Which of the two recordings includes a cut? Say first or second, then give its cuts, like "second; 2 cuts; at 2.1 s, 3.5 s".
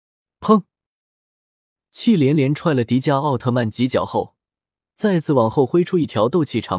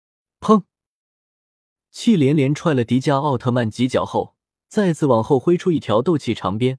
second; 1 cut; at 4.5 s